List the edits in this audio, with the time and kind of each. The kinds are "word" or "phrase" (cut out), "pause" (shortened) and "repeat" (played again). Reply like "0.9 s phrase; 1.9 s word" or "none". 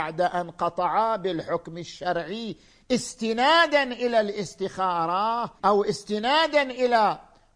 5.6 s pause